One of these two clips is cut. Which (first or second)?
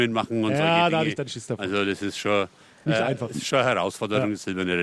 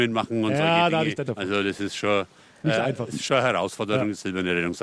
second